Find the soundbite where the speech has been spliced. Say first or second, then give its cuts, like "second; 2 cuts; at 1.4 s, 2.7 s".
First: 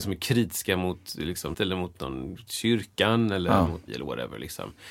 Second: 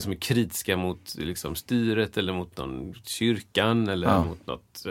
first; 2 cuts; at 1.5 s, 3.9 s